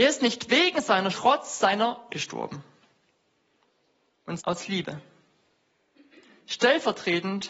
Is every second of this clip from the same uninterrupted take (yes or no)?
no